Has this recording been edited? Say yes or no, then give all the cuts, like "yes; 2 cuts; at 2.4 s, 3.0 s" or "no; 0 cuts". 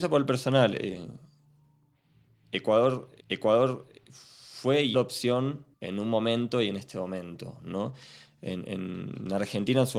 yes; 3 cuts; at 3.2 s, 4.9 s, 5.7 s